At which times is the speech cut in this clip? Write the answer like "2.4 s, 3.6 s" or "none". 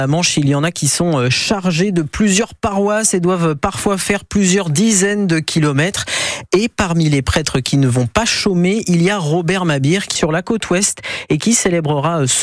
10.2 s